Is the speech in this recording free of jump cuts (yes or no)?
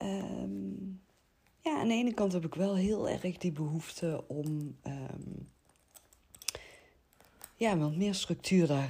yes